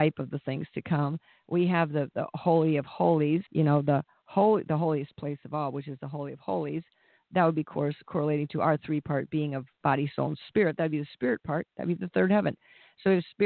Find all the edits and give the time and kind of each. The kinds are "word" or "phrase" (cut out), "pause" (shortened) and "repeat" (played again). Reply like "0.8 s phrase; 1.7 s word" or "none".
3.5 s pause

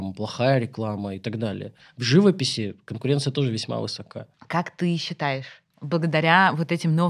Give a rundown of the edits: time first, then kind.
4.3 s pause

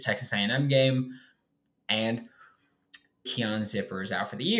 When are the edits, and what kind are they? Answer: 3.3 s word

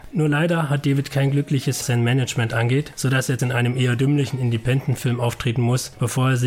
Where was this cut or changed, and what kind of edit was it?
1.8 s phrase; 3.4 s word

